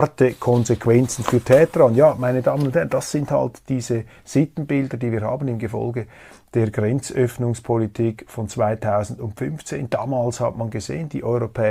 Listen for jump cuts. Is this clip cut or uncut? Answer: uncut